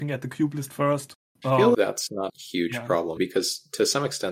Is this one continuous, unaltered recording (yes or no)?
no